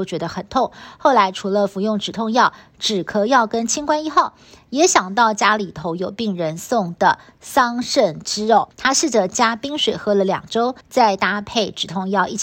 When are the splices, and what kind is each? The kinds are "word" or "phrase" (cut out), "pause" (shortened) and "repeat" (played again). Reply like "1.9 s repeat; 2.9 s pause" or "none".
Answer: 8.7 s pause; 10.8 s pause